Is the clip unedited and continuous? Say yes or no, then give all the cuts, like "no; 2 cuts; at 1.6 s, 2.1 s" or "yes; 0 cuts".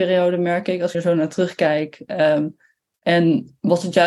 no; 1 cut; at 0.9 s